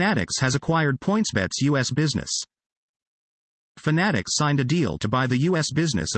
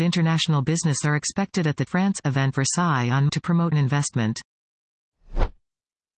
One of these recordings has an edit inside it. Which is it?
second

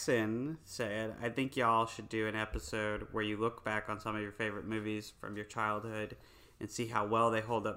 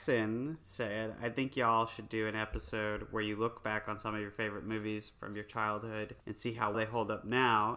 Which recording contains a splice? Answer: second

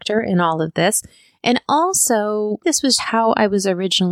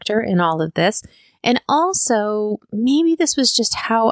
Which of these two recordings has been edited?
first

